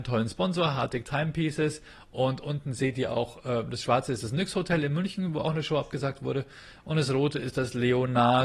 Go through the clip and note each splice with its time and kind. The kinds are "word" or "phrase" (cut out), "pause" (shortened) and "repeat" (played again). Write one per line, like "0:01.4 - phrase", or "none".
none